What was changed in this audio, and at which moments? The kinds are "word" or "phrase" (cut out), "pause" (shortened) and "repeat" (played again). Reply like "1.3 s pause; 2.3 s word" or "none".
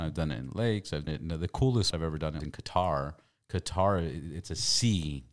1.1 s word; 1.9 s word; 2.4 s word